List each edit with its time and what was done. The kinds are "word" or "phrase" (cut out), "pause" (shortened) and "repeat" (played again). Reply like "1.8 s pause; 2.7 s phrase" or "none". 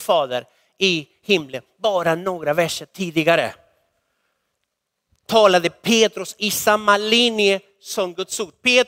none